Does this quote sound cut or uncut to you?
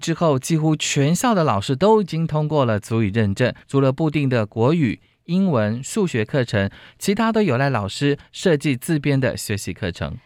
cut